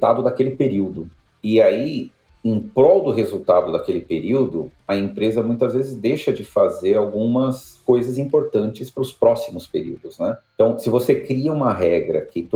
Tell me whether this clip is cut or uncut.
uncut